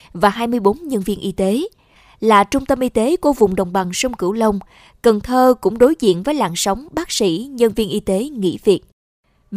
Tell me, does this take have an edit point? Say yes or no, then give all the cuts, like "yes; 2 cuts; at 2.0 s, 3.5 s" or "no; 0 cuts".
no; 0 cuts